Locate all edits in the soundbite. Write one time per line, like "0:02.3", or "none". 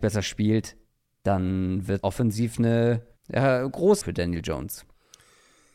0:02.0
0:03.2
0:04.0